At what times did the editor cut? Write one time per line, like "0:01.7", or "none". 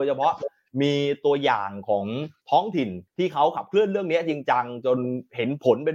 0:03.1